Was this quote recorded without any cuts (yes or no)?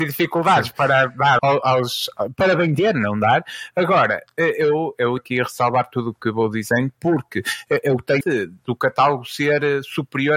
no